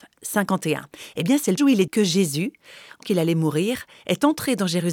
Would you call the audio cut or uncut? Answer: cut